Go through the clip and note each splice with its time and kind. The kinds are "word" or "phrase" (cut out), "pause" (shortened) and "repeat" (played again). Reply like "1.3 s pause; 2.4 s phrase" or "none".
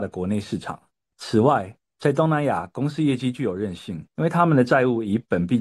4.1 s pause